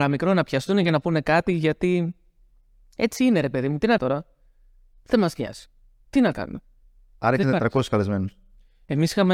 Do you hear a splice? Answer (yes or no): yes